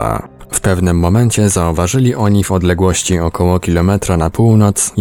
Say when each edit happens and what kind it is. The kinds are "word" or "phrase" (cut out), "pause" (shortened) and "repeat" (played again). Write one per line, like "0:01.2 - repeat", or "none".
none